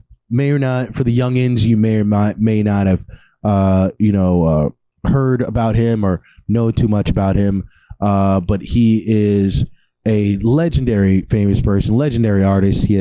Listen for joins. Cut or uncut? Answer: uncut